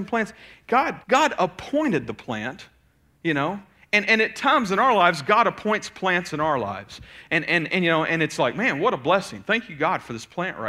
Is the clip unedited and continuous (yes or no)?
no